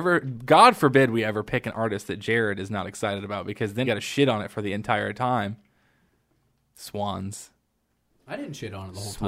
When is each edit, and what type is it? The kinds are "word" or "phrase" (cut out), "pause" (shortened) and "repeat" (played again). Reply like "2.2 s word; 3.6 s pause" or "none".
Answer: 3.8 s word